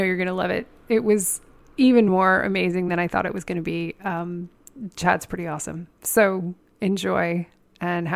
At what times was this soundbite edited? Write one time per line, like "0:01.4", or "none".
none